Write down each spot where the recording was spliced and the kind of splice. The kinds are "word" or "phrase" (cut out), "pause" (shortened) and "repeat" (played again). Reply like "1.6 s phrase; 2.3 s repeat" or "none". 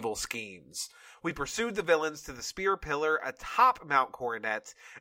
none